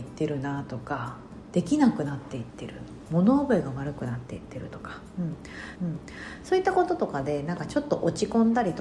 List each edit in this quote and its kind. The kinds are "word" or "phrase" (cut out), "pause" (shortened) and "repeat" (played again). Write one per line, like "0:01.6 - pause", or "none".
0:05.8 - repeat